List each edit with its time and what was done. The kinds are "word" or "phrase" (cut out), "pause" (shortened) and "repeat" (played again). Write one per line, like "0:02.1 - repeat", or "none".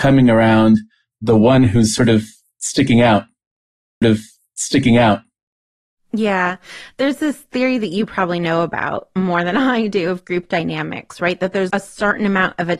0:04.0 - repeat
0:11.7 - word